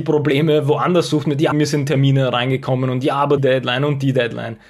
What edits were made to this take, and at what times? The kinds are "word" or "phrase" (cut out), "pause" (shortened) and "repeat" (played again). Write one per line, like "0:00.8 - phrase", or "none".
0:01.5 - word
0:03.4 - word